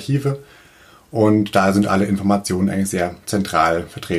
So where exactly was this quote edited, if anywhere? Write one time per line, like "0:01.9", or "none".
none